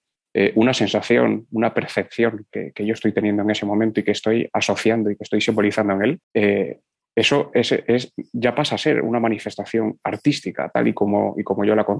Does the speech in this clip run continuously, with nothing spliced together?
no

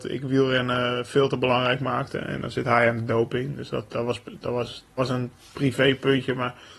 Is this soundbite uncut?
no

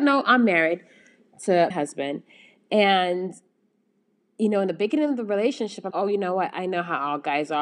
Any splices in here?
yes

